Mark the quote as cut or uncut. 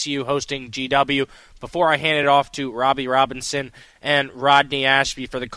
uncut